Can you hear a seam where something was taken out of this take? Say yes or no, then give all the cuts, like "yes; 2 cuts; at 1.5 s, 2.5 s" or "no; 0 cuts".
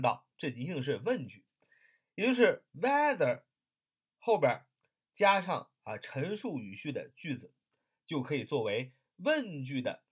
no; 0 cuts